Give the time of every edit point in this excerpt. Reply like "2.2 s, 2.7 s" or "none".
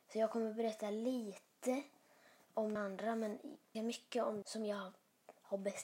2.8 s, 3.7 s, 4.4 s